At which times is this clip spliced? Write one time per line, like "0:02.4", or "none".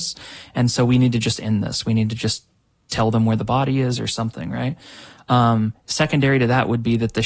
none

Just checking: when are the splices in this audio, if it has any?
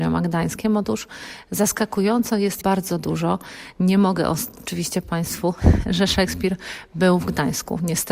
0:02.6
0:05.0

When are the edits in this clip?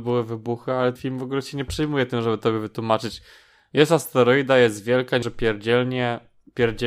0:01.0
0:05.2

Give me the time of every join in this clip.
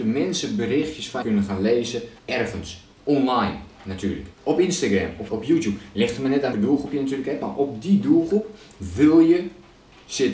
0:01.2
0:02.2
0:04.3
0:05.3
0:06.5

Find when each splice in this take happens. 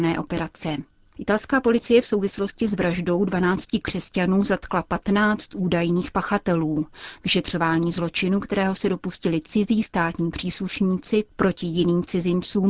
none

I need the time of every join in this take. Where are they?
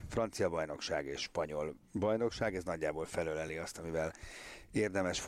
none

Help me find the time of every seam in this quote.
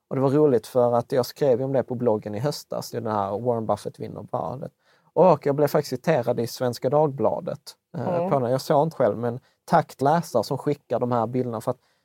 0:02.9
0:08.9
0:10.0

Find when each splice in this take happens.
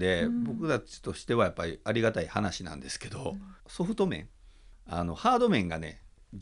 0:03.6

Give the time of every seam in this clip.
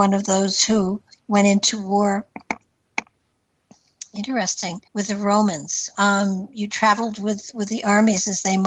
0:01.2
0:04.9

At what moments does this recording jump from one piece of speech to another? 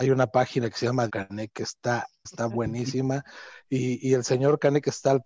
0:01.1
0:02.3

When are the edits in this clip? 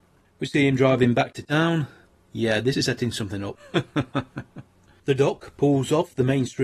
none

